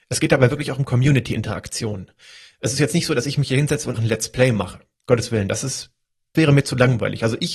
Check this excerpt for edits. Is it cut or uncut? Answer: cut